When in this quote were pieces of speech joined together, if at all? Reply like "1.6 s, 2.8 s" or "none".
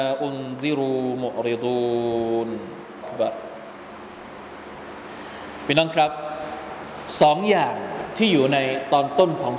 3.0 s